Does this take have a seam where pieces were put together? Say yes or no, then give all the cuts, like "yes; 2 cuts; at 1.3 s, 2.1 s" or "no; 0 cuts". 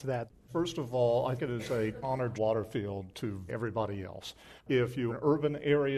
yes; 5 cuts; at 1.4 s, 2.0 s, 2.3 s, 3.5 s, 5.1 s